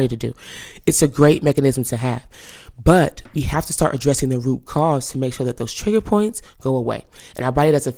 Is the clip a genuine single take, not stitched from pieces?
yes; 0 cuts

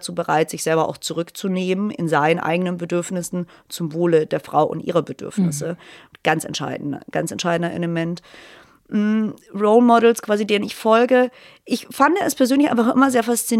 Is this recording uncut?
yes; 0 cuts

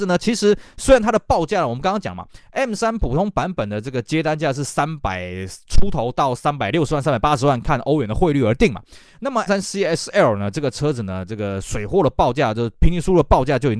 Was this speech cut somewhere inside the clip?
yes; 1 cut; at 9.5 s

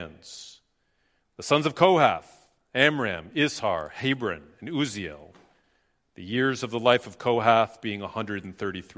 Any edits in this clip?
no; 0 cuts

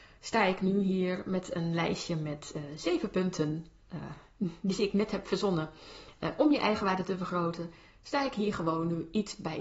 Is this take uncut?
yes; 0 cuts

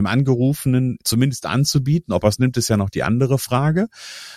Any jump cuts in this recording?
yes; 1 cut; at 1.0 s

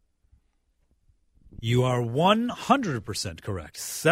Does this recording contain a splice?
no; 0 cuts

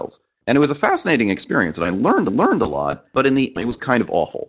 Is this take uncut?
no; 2 cuts; at 2.3 s, 3.5 s

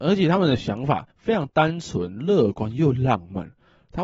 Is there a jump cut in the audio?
yes; 1 cut; at 1.1 s

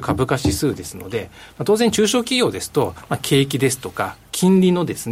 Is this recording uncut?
yes; 0 cuts

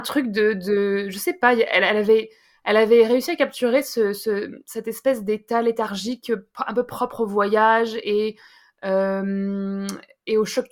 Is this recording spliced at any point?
no; 0 cuts

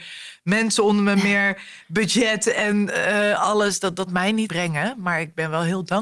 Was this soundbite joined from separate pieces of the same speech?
yes; 2 cuts; at 4.1 s, 4.5 s

